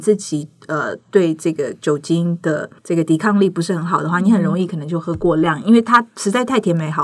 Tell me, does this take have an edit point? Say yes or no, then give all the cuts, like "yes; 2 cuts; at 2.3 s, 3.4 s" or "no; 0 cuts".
yes; 1 cut; at 2.8 s